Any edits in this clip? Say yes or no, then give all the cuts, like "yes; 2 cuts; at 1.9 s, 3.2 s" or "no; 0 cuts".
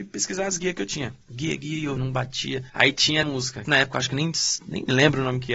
yes; 5 cuts; at 1.2 s, 2.0 s, 2.7 s, 3.2 s, 3.6 s